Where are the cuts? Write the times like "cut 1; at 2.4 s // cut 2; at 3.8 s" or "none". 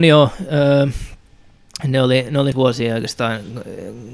cut 1; at 2.5 s